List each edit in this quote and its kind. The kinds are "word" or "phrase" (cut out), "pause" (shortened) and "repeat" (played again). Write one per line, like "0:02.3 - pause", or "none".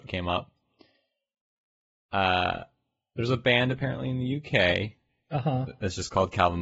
none